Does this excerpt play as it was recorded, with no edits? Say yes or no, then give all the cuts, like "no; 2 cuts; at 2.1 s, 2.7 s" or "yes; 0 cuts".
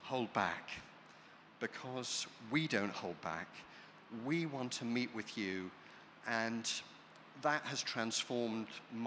yes; 0 cuts